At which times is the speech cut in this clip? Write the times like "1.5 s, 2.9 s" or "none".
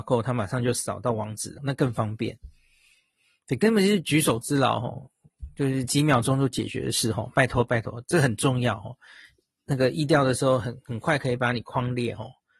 1.6 s